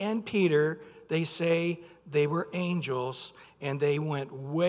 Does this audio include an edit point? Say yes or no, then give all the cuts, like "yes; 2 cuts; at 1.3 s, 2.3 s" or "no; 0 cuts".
no; 0 cuts